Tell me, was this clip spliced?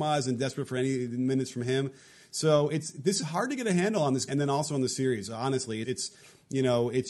yes; 3 cuts; at 3.2 s, 4.3 s, 5.8 s

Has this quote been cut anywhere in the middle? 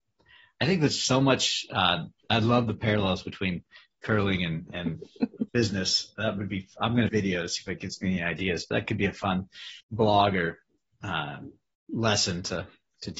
yes; 3 cuts; at 5.5 s, 7.1 s, 9.8 s

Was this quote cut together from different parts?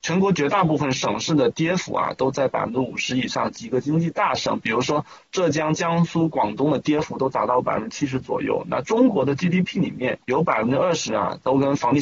yes; 1 cut; at 10.2 s

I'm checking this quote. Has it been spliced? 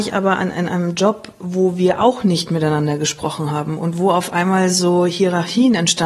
no; 0 cuts

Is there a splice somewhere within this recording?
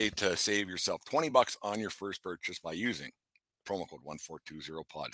no; 0 cuts

